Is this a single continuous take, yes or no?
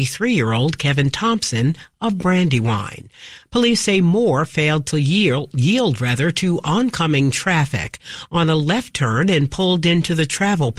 yes